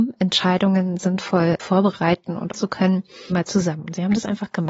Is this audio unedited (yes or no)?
no